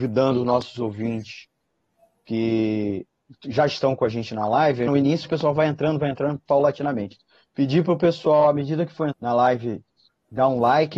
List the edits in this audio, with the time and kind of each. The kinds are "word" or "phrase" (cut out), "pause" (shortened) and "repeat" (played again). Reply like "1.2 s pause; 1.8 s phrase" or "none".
4.9 s word; 5.2 s word; 9.1 s word